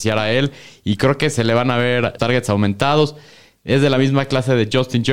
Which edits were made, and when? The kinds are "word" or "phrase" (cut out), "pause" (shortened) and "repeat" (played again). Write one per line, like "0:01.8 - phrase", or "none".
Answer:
0:02.2 - word